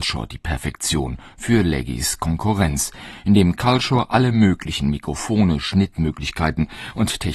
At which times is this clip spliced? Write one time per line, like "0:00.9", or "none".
none